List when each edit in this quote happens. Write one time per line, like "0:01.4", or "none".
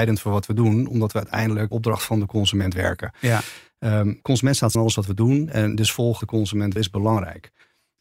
0:01.7
0:04.7
0:06.2
0:06.8